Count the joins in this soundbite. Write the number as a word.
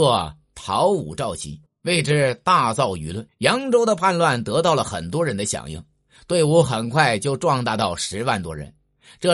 two